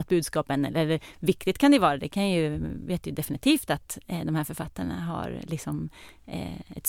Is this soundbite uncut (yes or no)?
yes